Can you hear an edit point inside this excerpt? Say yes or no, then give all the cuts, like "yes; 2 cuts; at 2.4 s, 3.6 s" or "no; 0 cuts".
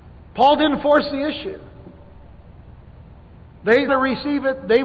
yes; 1 cut; at 3.9 s